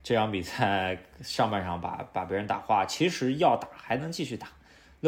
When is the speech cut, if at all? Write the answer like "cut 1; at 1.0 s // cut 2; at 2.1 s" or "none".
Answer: none